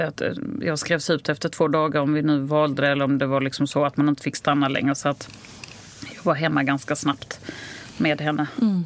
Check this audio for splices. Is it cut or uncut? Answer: uncut